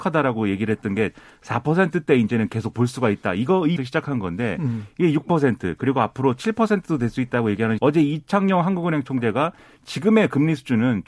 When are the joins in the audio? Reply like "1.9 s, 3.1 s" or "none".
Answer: 3.8 s, 7.8 s

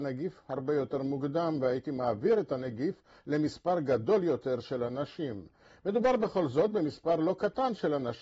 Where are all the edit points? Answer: none

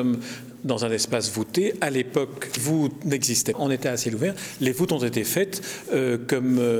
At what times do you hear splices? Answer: 2.6 s, 3.5 s

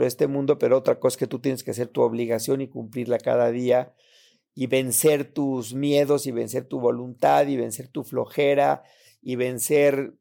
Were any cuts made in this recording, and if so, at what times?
4.5 s

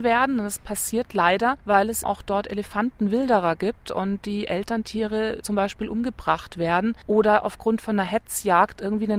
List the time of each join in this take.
2.0 s

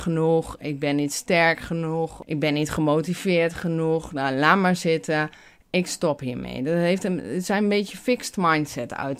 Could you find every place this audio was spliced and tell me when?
none

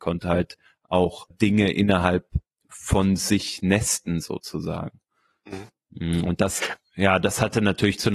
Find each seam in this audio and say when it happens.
1.3 s, 2.5 s

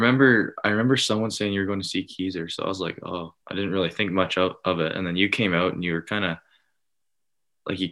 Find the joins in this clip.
3.4 s

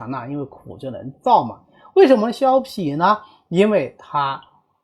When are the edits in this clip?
none

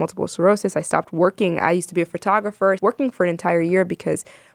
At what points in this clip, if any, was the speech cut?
2.8 s

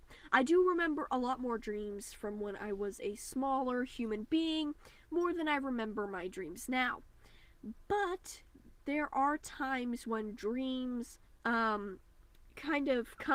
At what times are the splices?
11.2 s

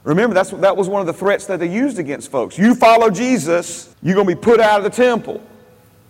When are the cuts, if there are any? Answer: 3.9 s

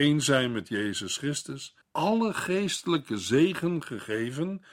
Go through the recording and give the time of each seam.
1.8 s

